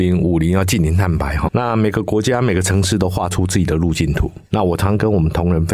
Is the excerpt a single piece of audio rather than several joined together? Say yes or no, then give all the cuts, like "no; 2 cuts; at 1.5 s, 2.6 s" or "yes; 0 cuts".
no; 2 cuts; at 1.5 s, 4.5 s